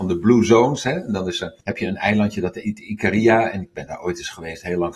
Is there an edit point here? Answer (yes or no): yes